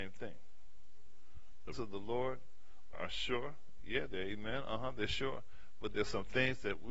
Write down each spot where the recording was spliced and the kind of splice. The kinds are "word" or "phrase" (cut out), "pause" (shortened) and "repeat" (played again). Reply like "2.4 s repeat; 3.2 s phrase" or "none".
1.7 s word; 2.9 s word